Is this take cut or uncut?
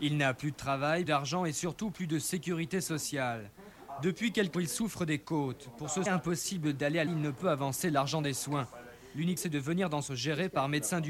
cut